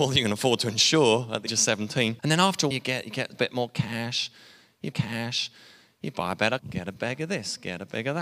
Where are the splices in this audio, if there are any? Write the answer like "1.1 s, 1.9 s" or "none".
1.5 s, 2.2 s, 2.7 s, 3.4 s, 4.9 s, 6.6 s